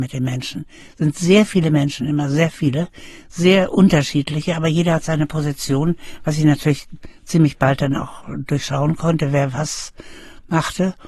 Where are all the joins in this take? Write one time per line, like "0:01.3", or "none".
none